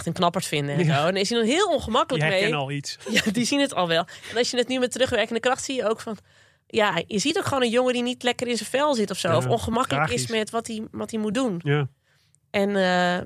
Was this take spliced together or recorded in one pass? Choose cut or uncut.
uncut